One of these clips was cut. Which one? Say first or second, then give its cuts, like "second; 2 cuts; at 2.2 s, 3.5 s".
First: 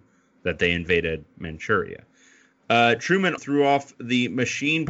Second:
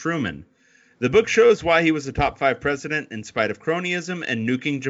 first; 1 cut; at 3.4 s